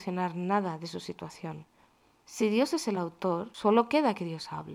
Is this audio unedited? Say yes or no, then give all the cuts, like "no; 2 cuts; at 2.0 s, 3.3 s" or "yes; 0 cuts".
yes; 0 cuts